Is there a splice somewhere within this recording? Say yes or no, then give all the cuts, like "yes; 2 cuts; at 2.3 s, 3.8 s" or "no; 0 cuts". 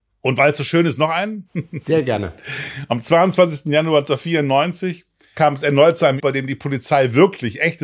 yes; 1 cut; at 6.2 s